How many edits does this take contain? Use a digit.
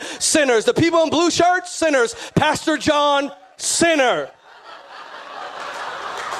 0